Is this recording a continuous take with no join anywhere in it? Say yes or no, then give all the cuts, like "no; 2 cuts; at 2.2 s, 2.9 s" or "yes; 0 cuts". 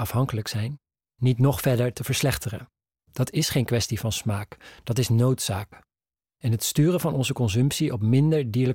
yes; 0 cuts